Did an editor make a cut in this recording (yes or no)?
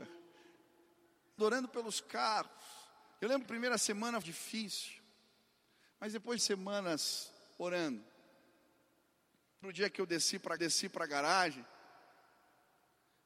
yes